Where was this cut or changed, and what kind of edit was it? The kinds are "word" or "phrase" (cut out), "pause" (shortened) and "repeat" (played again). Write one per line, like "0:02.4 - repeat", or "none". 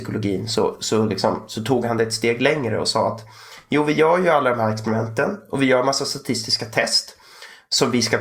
none